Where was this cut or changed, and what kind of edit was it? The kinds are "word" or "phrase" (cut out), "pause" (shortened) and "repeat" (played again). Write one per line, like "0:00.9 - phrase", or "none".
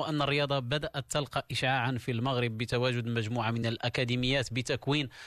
none